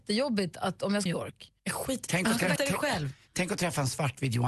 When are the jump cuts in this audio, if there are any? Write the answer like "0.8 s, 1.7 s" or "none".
1.1 s, 1.6 s, 2.1 s, 2.6 s